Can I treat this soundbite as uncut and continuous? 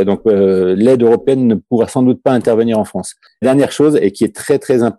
no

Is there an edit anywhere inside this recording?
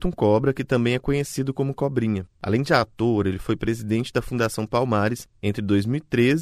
yes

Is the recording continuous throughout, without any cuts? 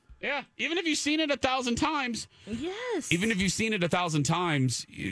yes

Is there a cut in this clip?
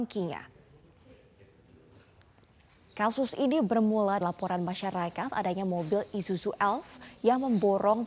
yes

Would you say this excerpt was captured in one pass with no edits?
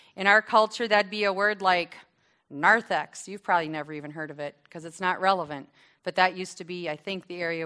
yes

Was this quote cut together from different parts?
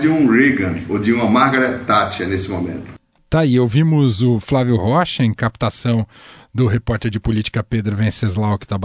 no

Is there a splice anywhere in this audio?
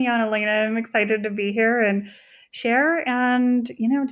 no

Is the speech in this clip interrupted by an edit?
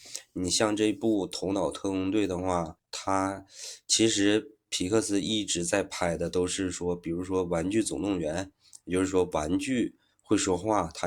yes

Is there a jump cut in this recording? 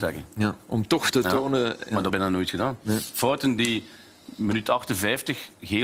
yes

